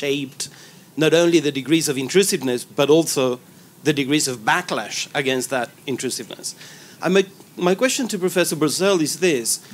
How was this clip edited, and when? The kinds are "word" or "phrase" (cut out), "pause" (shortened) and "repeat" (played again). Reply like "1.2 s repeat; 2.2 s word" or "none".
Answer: none

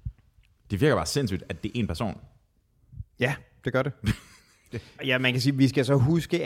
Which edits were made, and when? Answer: 5.0 s word

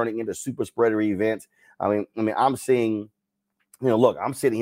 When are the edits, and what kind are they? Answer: none

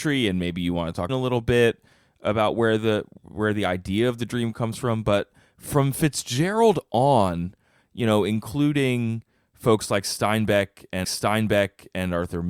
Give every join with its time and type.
1.1 s phrase; 11.0 s repeat

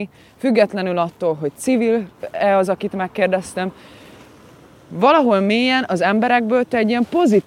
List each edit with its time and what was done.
none

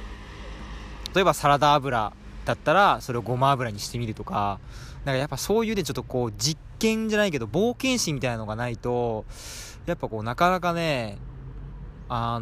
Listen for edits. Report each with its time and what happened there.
1.1 s phrase

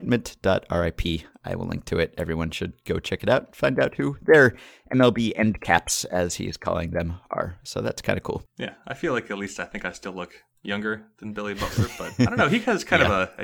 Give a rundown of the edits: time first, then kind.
none

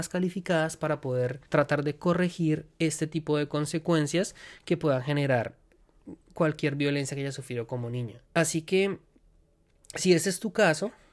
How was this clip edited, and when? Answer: 1.5 s pause; 6.2 s pause; 8.3 s pause

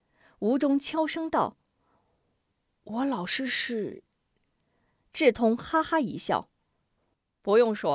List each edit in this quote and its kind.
none

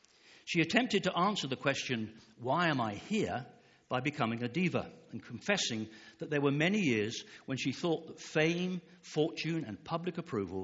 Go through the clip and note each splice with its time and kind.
none

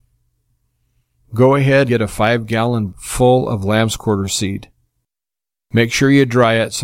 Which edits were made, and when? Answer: 1.9 s word; 2.9 s word

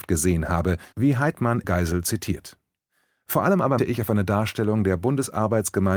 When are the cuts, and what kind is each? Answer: 0.9 s pause; 1.6 s word; 3.8 s word

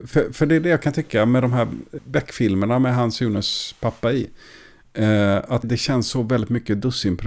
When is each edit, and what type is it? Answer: 2.0 s word; 5.6 s word

